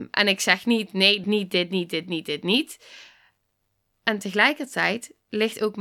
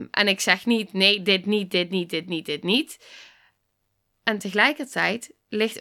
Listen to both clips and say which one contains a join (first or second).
first